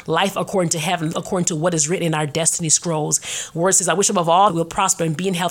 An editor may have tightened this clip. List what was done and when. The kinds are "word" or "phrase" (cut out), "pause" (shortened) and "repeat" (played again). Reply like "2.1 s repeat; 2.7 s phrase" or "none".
1.1 s word; 4.5 s word